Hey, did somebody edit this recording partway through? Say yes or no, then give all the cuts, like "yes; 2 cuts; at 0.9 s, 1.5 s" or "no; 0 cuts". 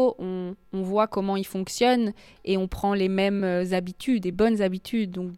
no; 0 cuts